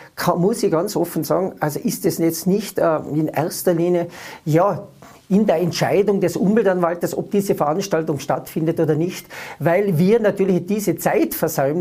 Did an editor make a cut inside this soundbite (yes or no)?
no